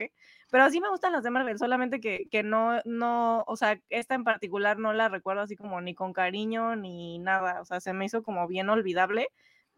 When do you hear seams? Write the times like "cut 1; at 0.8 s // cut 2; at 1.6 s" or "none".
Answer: none